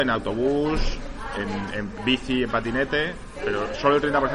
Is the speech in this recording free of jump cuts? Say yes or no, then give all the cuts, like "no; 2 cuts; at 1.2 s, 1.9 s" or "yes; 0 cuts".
yes; 0 cuts